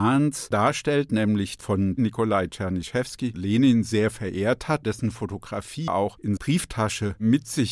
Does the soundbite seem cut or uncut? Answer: cut